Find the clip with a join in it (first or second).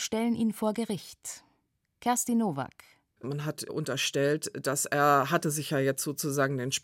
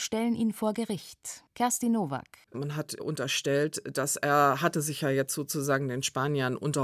second